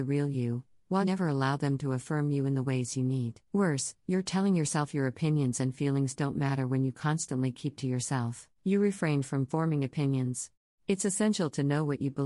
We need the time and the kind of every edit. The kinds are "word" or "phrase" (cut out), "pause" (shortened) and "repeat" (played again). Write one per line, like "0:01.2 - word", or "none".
0:01.0 - word
0:03.4 - pause
0:07.8 - word
0:08.5 - pause
0:10.6 - pause